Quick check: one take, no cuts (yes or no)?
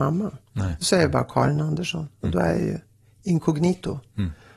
yes